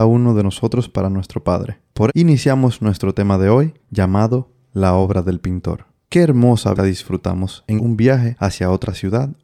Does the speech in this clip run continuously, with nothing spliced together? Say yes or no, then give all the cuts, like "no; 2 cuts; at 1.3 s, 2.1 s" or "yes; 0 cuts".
no; 4 cuts; at 2.1 s, 3.8 s, 6.8 s, 7.8 s